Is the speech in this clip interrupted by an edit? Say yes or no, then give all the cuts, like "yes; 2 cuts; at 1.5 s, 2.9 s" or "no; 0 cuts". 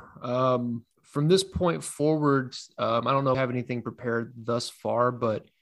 yes; 2 cuts; at 0.9 s, 3.3 s